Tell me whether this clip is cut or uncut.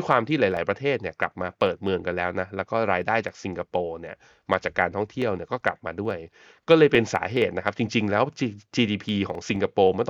uncut